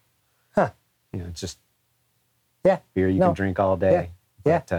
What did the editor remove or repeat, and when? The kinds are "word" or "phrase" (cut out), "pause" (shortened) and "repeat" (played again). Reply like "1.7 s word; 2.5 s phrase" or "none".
none